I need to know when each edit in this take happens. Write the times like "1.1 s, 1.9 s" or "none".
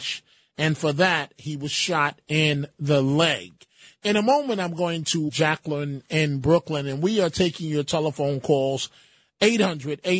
5.3 s